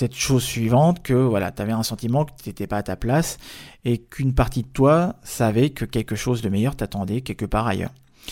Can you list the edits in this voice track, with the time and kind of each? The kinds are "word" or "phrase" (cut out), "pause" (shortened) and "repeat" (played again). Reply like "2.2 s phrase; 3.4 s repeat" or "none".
none